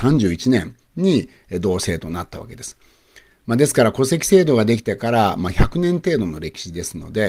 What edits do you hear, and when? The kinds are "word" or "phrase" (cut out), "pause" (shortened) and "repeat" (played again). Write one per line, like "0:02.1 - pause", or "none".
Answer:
none